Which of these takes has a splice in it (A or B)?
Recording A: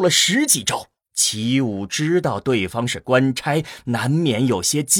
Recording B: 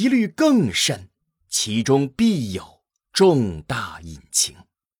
A